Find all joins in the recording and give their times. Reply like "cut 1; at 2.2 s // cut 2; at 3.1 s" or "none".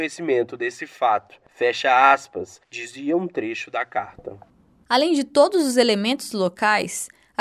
cut 1; at 2.6 s